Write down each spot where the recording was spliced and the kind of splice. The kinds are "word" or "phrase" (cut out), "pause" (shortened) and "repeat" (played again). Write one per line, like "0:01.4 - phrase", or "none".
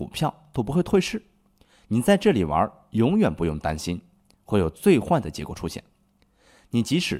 none